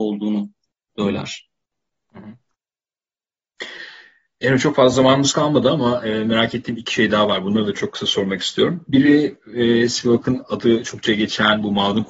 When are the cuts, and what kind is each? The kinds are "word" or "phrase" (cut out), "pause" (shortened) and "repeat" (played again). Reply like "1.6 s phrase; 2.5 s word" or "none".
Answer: none